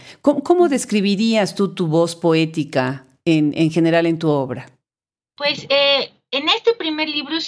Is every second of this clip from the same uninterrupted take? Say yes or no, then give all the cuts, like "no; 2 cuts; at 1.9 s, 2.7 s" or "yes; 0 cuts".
yes; 0 cuts